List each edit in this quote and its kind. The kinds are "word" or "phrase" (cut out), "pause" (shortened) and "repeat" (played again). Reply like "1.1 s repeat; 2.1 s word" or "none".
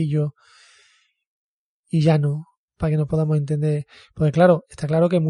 none